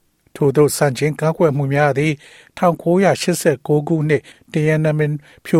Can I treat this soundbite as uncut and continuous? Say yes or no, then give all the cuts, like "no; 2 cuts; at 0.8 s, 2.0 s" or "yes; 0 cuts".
yes; 0 cuts